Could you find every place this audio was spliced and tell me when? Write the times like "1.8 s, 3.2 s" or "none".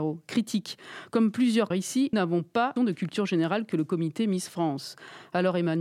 1.7 s, 2.1 s, 2.8 s